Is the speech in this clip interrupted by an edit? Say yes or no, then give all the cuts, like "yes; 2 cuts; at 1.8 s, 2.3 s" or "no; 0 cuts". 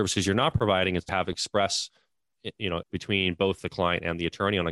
yes; 2 cuts; at 1.1 s, 2.8 s